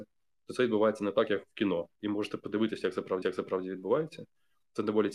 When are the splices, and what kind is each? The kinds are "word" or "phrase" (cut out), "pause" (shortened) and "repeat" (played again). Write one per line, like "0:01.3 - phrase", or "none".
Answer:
0:01.9 - pause
0:03.2 - repeat

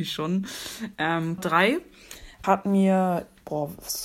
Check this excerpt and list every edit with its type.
0:01.4 - word
0:02.4 - word

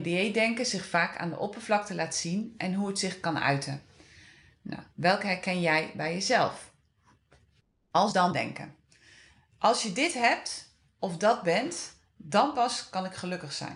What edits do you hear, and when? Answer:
none

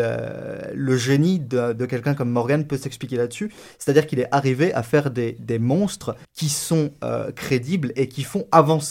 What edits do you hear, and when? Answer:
0:06.2 - pause

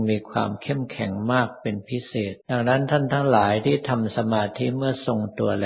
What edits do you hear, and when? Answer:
0:02.4 - pause

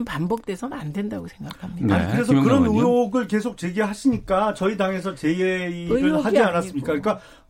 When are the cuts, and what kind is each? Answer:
none

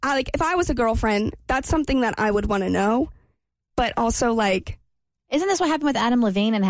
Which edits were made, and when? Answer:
none

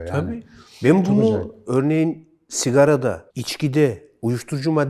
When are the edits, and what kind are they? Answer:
0:03.3 - pause

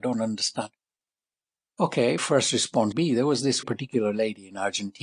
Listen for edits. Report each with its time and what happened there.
0:02.2 - word
0:02.9 - word
0:03.6 - word

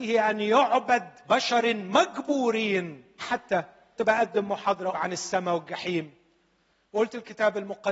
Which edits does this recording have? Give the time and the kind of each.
0:01.2 - word
0:03.2 - word
0:04.0 - word
0:04.9 - word

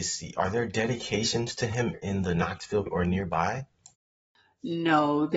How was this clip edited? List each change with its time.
0:01.9 - word
0:02.9 - word

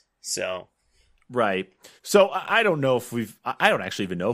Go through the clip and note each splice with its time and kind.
0:02.0 - pause

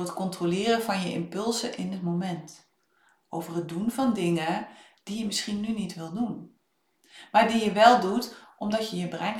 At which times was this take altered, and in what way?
none

